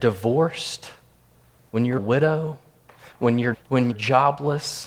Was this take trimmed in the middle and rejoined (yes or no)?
yes